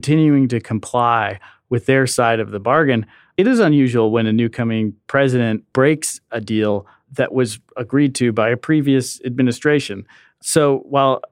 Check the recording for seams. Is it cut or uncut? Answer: uncut